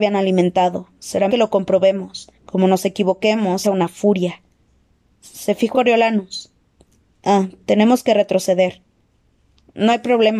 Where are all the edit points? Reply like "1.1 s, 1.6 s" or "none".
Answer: 1.3 s, 2.3 s, 3.6 s, 5.7 s, 7.6 s